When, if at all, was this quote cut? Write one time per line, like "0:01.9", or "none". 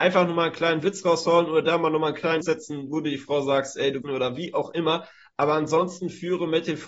0:02.4
0:04.0